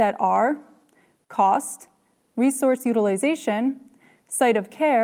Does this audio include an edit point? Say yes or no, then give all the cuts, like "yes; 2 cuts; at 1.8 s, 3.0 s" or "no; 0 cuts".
no; 0 cuts